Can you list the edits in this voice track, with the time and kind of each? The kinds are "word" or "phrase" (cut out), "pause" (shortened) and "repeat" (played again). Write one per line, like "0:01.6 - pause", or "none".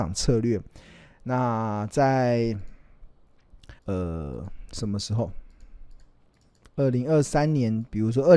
0:03.8 - pause
0:06.5 - pause